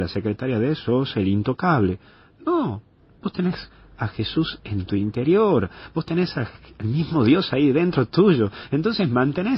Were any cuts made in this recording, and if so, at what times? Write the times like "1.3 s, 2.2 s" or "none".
none